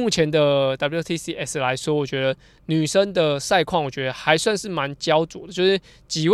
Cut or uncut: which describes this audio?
uncut